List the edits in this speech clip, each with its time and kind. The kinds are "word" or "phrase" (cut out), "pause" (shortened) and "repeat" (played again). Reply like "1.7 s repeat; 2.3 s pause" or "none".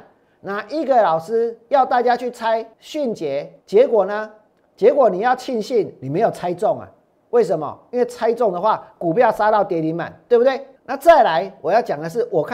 2.7 s pause; 3.6 s pause; 10.8 s pause